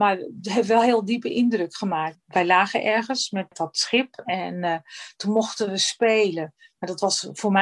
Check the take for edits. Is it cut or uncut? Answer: cut